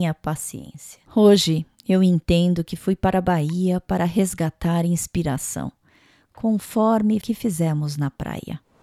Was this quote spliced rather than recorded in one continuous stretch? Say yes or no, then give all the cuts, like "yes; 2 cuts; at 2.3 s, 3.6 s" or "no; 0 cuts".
yes; 2 cuts; at 1.0 s, 7.2 s